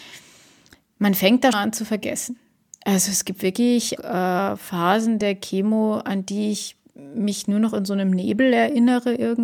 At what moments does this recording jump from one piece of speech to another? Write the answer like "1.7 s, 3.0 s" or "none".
1.5 s, 4.0 s